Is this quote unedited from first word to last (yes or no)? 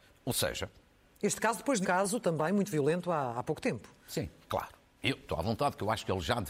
no